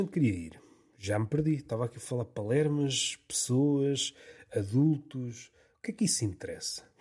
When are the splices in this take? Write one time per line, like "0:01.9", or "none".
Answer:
none

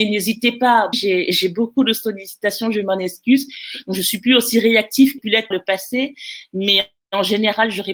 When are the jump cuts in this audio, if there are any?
0:00.9
0:05.2
0:05.5

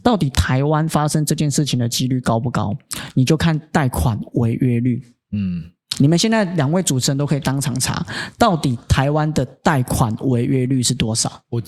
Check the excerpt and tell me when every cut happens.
none

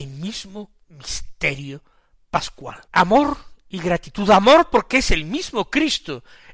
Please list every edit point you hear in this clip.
0:02.8

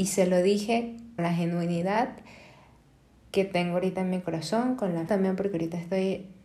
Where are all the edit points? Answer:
0:01.2
0:05.1

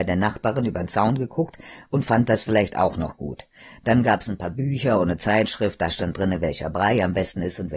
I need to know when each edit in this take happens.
none

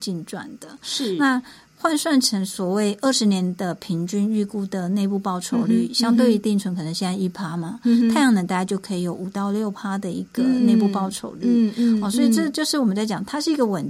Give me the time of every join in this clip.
none

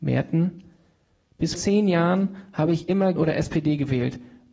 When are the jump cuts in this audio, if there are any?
0:01.5
0:03.2

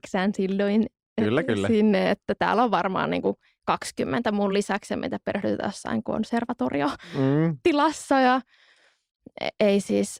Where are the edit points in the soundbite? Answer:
none

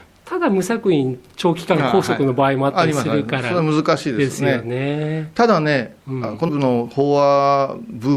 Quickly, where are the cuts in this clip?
0:06.5

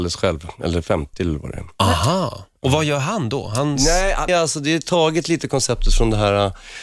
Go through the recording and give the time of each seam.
0:04.3

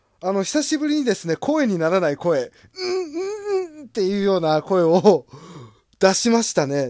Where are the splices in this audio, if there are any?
none

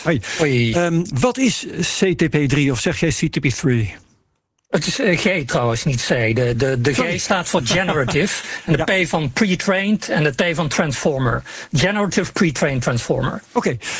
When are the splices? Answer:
none

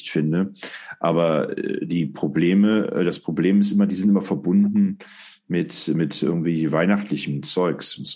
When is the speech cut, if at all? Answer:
none

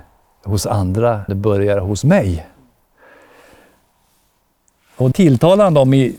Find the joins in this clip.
0:01.3
0:05.1

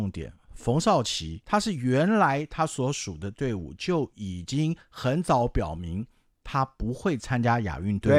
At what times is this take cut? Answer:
0:01.4

